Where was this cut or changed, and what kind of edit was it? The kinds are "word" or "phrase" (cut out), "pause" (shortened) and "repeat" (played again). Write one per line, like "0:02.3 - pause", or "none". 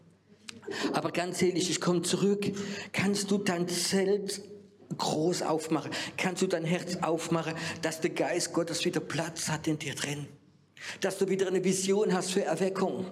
none